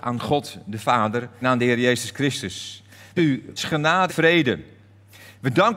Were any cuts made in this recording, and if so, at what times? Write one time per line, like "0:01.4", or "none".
0:01.4
0:03.2
0:03.6
0:04.1